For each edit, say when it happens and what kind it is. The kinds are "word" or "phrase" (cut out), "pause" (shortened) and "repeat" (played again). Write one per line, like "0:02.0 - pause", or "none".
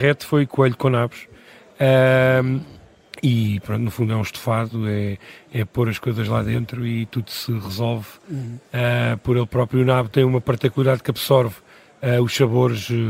none